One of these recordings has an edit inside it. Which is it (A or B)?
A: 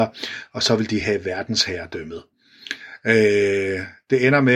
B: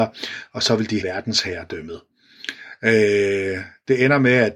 B